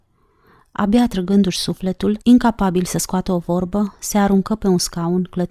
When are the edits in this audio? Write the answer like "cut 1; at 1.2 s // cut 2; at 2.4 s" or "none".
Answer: cut 1; at 2.2 s